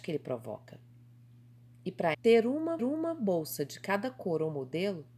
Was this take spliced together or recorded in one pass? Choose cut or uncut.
cut